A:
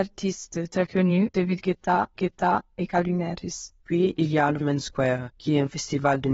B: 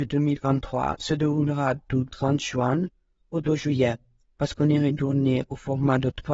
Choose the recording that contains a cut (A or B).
A